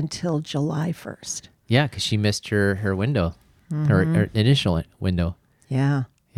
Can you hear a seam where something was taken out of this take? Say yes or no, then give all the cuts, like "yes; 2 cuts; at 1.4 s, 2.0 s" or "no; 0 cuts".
no; 0 cuts